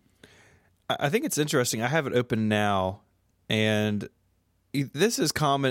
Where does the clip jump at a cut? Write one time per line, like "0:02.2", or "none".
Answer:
none